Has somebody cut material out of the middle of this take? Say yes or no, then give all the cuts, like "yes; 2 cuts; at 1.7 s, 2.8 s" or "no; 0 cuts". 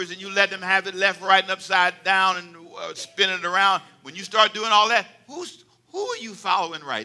no; 0 cuts